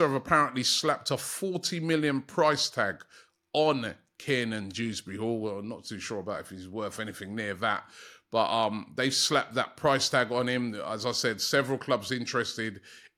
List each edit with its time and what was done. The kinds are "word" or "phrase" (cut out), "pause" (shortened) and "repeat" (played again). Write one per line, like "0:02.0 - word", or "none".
none